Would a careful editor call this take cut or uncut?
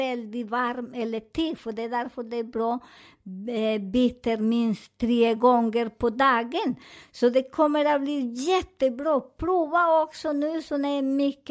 uncut